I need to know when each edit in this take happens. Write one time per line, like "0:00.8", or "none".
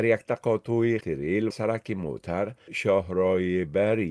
0:01.0
0:01.5
0:02.7